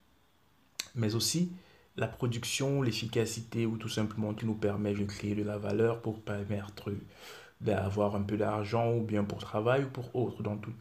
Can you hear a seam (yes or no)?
yes